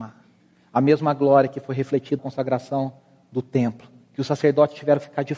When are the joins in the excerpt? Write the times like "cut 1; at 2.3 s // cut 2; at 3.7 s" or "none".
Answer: cut 1; at 2.2 s